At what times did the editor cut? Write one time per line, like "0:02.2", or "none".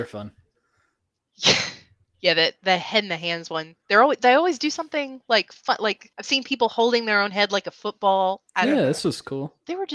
0:06.1